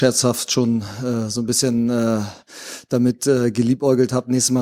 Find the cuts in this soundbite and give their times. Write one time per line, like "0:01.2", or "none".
none